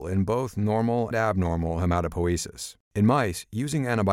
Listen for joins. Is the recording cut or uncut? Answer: cut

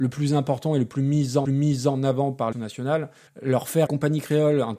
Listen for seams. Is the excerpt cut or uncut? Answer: cut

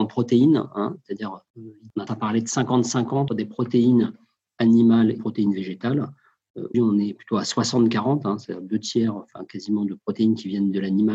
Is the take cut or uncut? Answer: cut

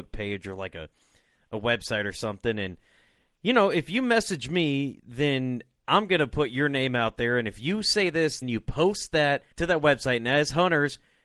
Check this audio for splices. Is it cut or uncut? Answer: cut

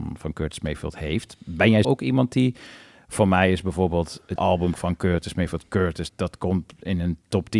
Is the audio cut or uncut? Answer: cut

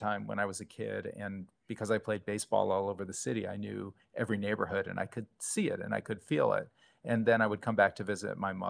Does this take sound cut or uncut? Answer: cut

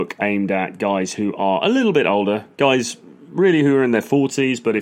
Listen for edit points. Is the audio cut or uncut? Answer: uncut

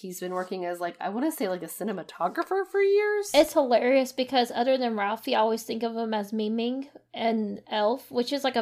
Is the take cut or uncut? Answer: uncut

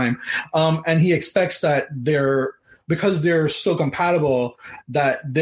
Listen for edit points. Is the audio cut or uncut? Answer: uncut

